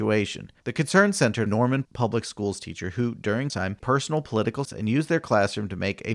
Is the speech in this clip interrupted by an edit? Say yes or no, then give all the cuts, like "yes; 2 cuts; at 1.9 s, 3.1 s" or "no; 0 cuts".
yes; 4 cuts; at 1.5 s, 3.5 s, 3.8 s, 4.7 s